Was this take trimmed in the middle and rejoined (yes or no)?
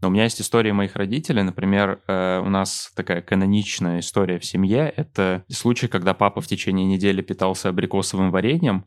no